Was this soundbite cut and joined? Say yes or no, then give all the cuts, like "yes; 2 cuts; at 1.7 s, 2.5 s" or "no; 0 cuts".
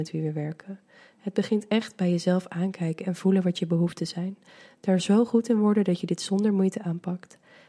no; 0 cuts